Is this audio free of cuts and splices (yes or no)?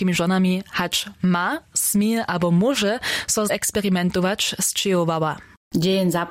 no